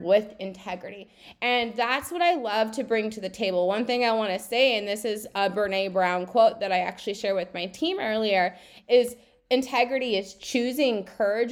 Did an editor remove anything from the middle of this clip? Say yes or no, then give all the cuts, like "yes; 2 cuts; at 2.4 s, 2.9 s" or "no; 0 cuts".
no; 0 cuts